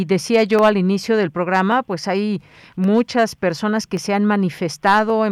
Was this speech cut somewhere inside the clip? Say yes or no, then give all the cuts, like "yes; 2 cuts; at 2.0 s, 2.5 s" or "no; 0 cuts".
no; 0 cuts